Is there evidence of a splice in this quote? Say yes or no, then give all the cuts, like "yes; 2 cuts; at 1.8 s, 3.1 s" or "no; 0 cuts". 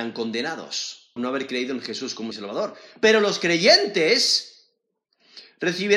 yes; 2 cuts; at 1.2 s, 2.3 s